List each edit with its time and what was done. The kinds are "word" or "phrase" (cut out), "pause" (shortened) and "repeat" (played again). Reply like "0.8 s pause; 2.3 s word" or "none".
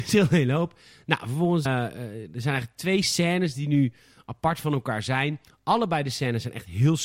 1.7 s word